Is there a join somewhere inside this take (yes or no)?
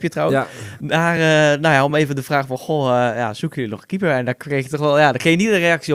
no